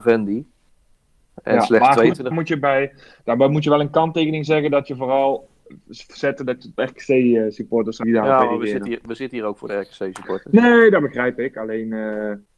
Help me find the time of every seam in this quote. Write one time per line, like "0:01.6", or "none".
0:02.3
0:06.8
0:08.0